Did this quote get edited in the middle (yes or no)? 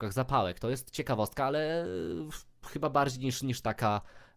no